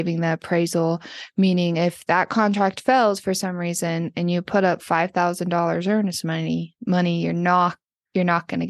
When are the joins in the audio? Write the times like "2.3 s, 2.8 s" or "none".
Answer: none